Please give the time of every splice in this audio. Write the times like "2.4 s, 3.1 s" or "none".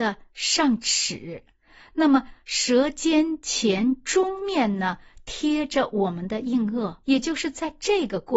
7.0 s